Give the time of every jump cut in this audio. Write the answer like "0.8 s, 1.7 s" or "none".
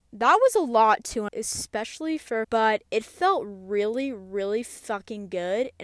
1.3 s, 2.4 s